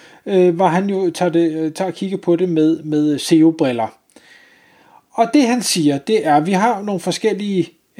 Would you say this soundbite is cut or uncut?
uncut